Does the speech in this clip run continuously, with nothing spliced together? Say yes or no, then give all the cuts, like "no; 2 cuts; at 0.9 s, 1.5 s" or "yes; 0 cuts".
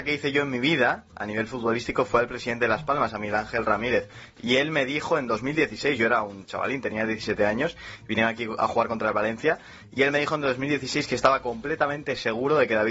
yes; 0 cuts